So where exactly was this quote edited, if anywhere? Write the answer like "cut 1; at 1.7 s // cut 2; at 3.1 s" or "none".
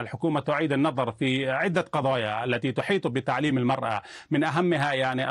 none